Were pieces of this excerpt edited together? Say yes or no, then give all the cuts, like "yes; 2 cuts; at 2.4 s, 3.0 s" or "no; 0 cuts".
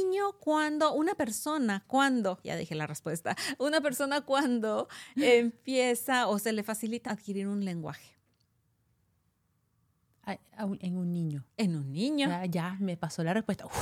yes; 4 cuts; at 2.4 s, 7.1 s, 10.5 s, 11.5 s